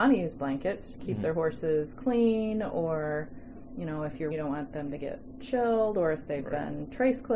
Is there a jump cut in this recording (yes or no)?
yes